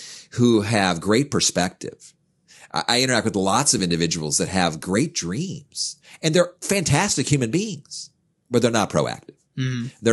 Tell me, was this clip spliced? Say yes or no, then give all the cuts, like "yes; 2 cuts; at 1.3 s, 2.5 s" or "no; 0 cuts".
no; 0 cuts